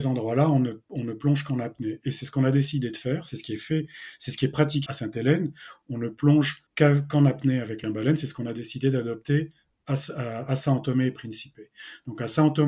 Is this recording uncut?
no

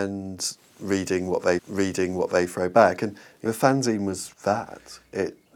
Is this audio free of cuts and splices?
no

